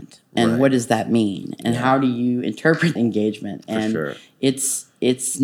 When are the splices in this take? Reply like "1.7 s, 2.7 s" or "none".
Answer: 3.0 s